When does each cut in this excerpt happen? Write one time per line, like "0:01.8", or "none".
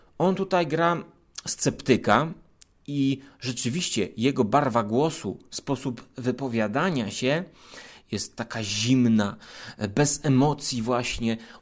none